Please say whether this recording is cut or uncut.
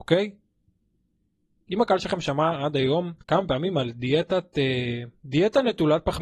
cut